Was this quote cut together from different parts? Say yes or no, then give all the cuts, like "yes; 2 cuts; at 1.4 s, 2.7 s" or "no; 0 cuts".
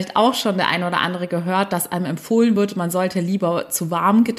no; 0 cuts